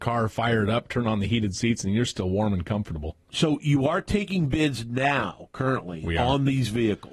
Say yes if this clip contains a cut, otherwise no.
no